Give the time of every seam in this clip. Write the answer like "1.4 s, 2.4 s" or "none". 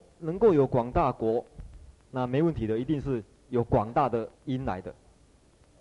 4.3 s